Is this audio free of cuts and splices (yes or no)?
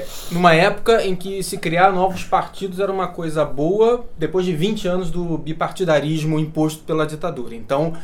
yes